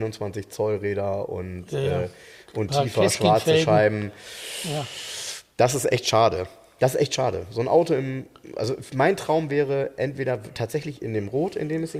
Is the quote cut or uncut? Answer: uncut